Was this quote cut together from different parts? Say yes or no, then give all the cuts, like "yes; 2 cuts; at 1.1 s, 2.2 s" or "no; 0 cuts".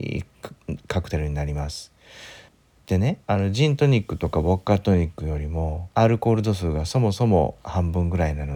yes; 3 cuts; at 2.5 s, 3.2 s, 5.9 s